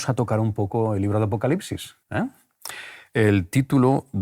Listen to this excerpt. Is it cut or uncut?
cut